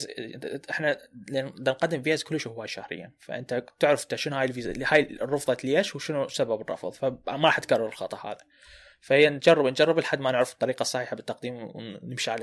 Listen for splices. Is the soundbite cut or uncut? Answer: uncut